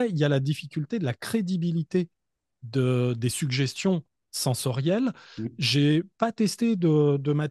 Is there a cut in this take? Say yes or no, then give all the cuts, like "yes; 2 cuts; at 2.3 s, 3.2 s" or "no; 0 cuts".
no; 0 cuts